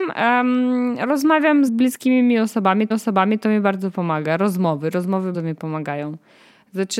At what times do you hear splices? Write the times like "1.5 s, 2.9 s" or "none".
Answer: 1.7 s, 2.9 s, 5.3 s

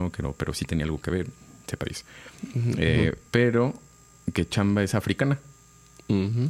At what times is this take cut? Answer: none

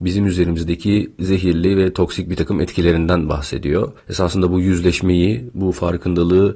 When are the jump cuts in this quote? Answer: 4.0 s

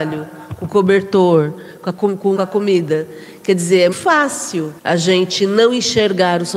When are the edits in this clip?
2.4 s, 3.9 s, 4.8 s

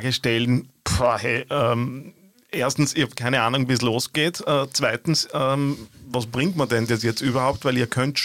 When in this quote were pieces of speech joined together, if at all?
none

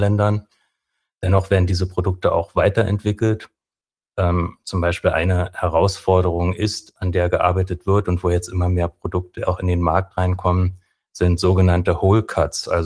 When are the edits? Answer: none

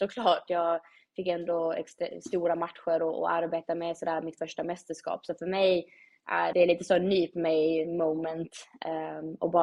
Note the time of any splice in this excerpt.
6.5 s

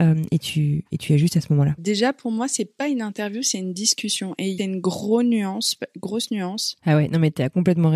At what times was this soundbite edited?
1.8 s, 4.6 s

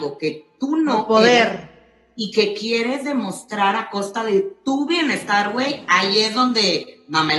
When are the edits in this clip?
none

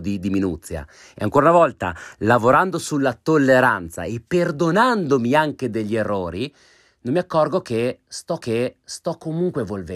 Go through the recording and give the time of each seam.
8.4 s

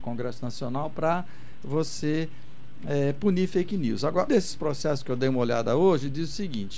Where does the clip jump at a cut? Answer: 4.3 s

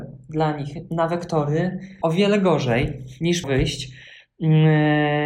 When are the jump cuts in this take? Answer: 2.0 s, 3.4 s

